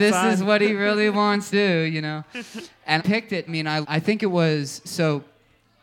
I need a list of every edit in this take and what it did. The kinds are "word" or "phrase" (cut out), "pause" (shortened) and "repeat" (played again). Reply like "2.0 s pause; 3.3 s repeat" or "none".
1.5 s word; 3.0 s word; 3.5 s phrase; 3.8 s word